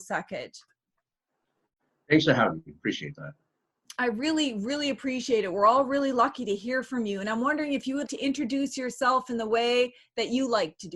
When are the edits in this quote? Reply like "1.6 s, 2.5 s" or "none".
8.1 s